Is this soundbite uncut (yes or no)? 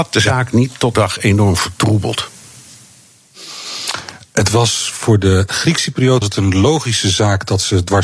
no